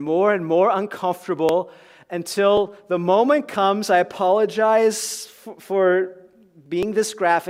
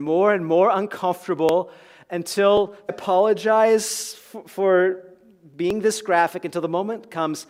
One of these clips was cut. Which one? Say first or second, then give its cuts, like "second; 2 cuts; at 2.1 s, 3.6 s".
second; 1 cut; at 2.9 s